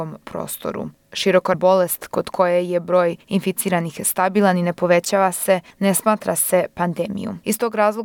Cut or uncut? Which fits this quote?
cut